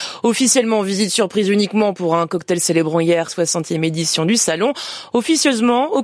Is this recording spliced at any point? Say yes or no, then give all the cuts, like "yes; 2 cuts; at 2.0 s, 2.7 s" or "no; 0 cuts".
yes; 1 cut; at 3.3 s